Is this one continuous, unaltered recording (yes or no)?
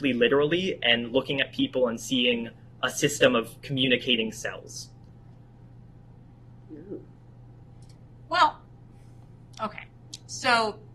yes